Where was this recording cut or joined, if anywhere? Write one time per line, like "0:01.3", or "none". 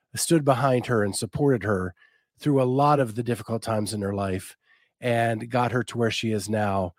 none